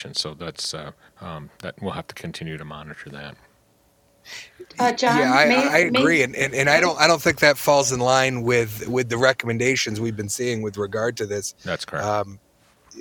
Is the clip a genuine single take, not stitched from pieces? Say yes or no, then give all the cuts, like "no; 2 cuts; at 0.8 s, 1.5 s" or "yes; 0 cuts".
no; 1 cut; at 1.1 s